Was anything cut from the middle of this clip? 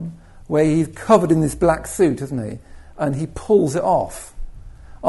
no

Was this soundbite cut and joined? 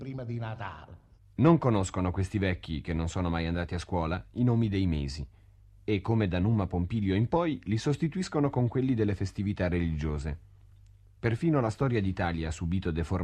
no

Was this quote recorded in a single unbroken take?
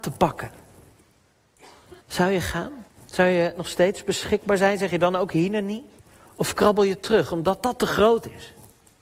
no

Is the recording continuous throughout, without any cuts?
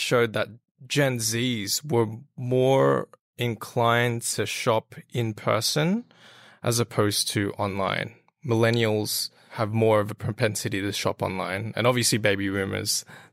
yes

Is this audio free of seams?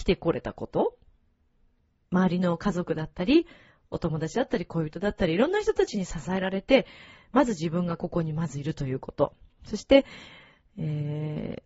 yes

